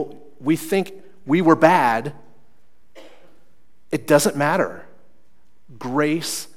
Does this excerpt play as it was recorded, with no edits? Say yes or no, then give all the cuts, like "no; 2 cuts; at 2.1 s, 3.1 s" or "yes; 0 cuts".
yes; 0 cuts